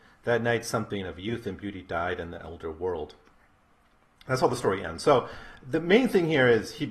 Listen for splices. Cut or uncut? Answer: uncut